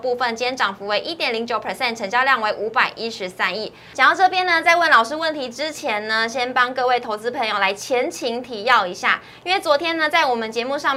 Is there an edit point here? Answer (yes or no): no